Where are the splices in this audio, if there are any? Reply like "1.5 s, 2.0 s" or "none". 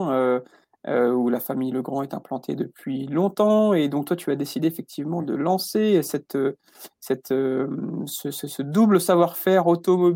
none